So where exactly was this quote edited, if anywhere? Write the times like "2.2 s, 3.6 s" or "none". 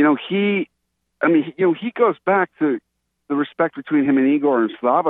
none